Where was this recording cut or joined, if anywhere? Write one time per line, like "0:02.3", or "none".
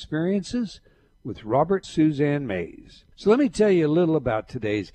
0:01.8
0:03.1

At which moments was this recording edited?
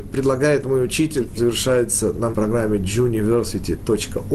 0:01.4
0:02.3

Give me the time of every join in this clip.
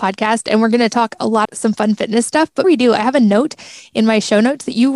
0:01.4
0:02.6

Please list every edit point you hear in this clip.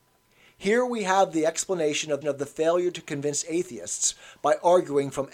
0:02.2

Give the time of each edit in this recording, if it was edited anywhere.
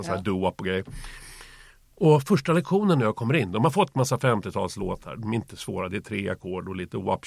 none

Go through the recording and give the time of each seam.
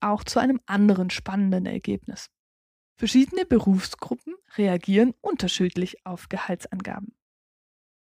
none

